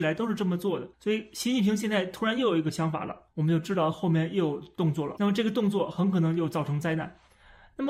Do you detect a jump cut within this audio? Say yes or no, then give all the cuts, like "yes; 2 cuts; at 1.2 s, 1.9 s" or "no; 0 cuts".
yes; 1 cut; at 0.9 s